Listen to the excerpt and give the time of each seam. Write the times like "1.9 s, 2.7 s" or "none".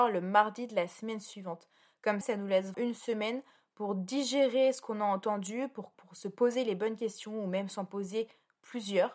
2.2 s, 2.7 s, 5.9 s